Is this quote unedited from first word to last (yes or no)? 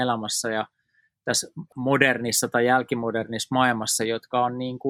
yes